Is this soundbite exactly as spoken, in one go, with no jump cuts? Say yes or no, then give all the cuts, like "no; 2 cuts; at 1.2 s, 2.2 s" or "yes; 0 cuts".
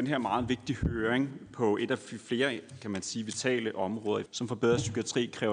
no; 1 cut; at 4.3 s